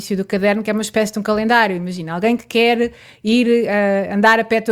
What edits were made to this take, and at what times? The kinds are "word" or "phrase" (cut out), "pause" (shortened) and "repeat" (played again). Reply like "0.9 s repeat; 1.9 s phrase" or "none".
none